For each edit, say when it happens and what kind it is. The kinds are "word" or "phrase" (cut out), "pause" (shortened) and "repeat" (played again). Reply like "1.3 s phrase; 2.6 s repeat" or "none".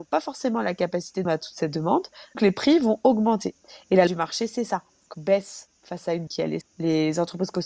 1.2 s word; 2.3 s word; 4.1 s word; 5.1 s word; 6.3 s word; 6.6 s word